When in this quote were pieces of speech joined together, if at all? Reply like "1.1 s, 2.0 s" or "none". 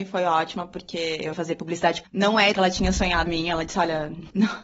1.3 s, 2.0 s, 2.5 s, 3.3 s